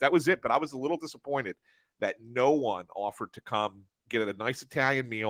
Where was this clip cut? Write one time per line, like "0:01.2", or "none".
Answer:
none